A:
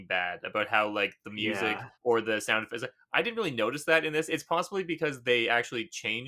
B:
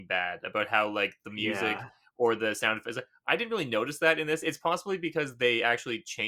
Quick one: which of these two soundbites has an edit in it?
A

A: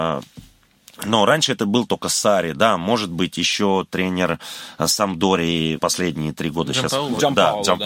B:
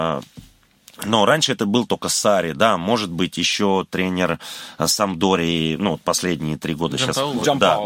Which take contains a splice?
A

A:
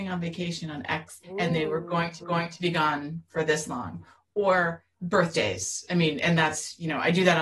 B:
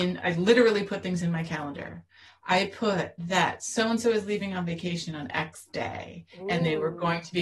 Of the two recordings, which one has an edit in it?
A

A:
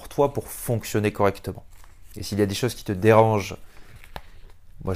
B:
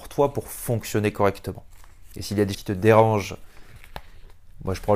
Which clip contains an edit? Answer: B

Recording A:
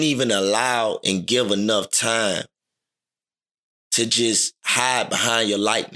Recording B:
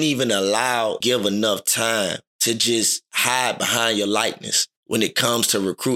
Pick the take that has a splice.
B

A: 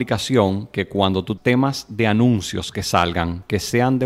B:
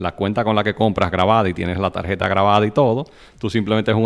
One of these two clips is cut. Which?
A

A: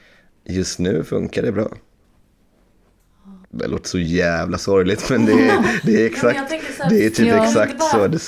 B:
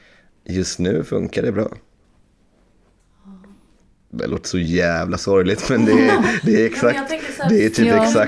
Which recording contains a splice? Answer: A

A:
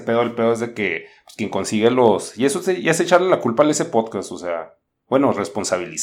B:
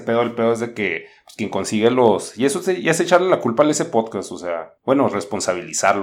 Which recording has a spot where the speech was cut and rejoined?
B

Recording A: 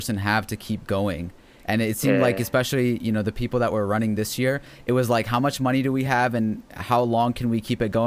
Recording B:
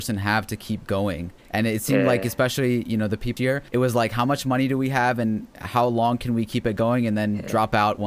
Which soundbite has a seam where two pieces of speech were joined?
B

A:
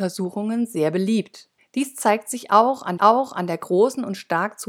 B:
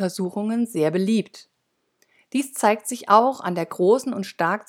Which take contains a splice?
A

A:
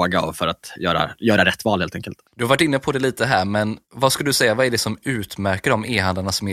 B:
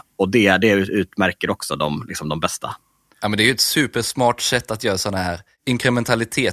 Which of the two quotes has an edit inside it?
A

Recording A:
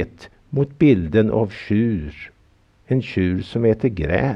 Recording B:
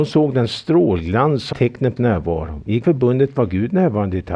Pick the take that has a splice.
B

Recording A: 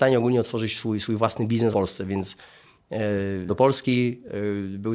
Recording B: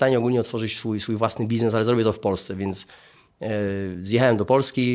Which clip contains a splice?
A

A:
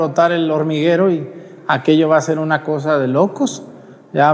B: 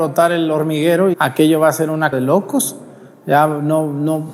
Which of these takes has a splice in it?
B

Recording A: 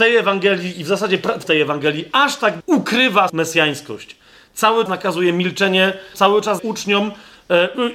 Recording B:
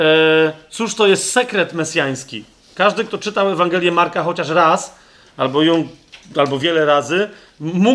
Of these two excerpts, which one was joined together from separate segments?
A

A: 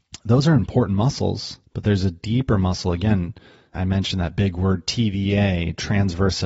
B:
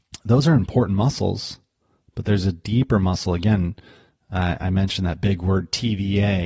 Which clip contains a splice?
A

